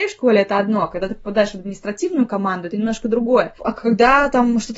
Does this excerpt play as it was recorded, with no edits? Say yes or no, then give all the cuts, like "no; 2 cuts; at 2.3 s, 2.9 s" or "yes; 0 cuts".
yes; 0 cuts